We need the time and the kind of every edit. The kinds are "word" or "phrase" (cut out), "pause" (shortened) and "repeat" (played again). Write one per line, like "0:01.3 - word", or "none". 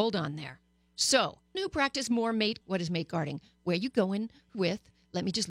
0:01.5 - word
0:02.6 - word
0:04.5 - word